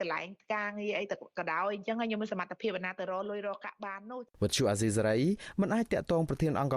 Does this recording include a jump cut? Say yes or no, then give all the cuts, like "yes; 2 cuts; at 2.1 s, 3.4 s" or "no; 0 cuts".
yes; 1 cut; at 4.3 s